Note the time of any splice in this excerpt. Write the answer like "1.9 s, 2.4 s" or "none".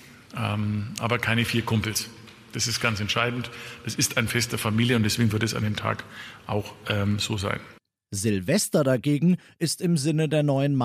none